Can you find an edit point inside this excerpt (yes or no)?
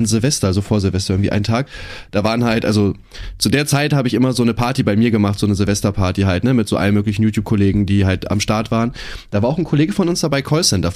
no